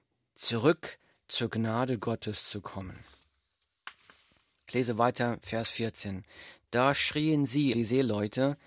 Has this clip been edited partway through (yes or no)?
yes